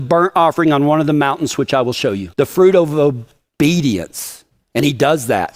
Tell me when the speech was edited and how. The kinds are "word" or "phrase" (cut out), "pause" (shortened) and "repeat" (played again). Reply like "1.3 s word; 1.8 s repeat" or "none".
2.3 s pause